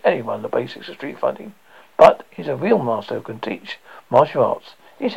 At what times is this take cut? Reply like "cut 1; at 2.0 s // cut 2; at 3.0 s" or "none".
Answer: none